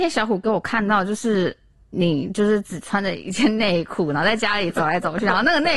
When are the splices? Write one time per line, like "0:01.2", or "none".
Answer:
none